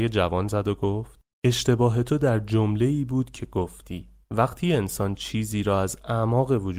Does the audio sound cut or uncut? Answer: cut